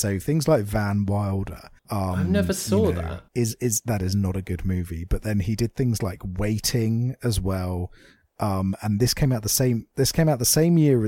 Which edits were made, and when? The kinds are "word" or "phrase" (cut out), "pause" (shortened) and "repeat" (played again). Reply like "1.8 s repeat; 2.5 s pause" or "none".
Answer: 1.8 s pause; 3.3 s pause